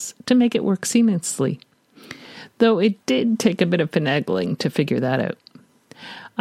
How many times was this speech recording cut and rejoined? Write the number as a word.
one